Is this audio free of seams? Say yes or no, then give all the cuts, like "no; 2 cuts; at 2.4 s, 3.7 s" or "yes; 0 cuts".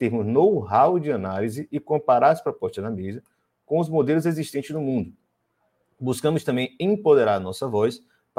yes; 0 cuts